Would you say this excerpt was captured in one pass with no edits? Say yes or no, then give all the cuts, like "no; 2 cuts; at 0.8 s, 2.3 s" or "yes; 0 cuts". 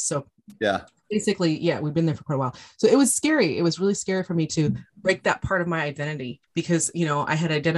no; 1 cut; at 6.4 s